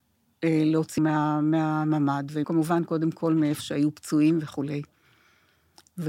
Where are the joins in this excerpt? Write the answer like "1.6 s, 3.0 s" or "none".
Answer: 1.0 s, 2.4 s